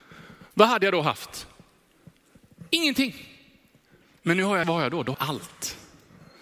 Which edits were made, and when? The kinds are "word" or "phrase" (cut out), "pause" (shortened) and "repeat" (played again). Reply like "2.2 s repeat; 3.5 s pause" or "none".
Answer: 4.6 s word; 5.1 s word